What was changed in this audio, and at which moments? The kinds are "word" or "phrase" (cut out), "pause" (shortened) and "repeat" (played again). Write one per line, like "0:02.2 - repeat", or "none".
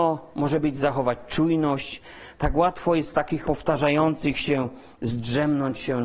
0:03.4 - word